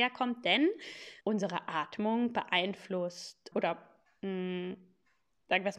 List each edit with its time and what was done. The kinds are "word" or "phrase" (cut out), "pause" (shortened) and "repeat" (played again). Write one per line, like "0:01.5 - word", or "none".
0:01.2 - pause
0:03.5 - word